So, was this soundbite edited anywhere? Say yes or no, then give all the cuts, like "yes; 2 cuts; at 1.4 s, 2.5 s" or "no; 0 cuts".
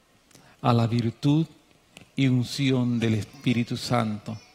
no; 0 cuts